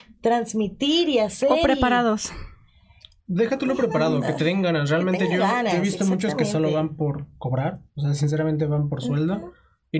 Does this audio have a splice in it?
no; 0 cuts

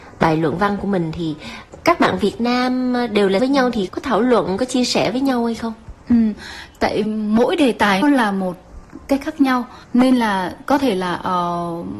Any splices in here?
yes; 5 cuts; at 3.4 s, 3.9 s, 7.0 s, 8.0 s, 9.8 s

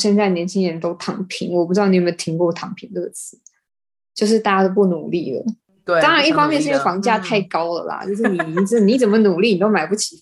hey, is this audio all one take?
yes; 0 cuts

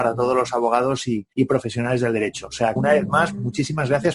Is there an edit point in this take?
yes; 2 cuts; at 1.3 s, 2.8 s

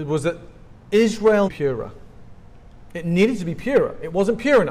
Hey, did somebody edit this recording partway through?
yes; 1 cut; at 1.5 s

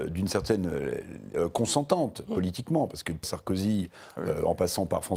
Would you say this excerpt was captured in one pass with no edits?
no; 2 cuts; at 1.3 s, 3.2 s

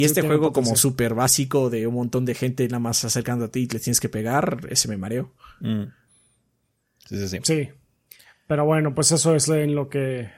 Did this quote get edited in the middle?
no; 0 cuts

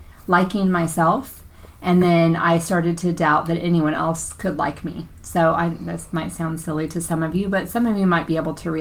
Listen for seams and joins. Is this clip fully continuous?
yes; 0 cuts

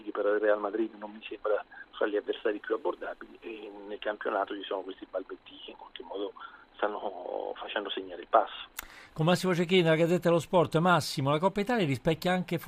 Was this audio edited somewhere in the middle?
no; 0 cuts

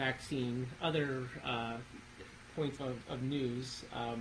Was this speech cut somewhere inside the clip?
yes; 1 cut; at 2.8 s

